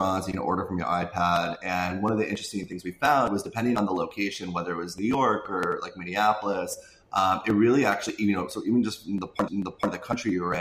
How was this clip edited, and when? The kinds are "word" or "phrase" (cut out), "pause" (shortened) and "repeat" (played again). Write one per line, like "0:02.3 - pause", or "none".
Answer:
0:09.5 - repeat